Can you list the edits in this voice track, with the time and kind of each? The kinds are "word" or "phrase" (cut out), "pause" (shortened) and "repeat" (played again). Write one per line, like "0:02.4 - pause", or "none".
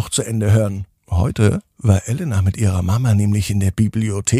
0:01.0 - pause